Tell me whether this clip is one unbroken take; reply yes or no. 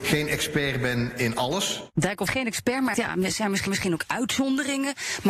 no